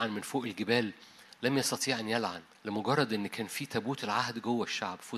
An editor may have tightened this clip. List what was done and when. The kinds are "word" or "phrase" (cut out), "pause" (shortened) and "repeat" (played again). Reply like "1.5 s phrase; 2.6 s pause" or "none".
2.5 s pause